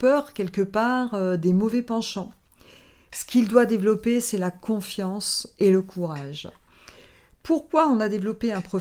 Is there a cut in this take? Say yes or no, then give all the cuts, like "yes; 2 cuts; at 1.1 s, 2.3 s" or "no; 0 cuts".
no; 0 cuts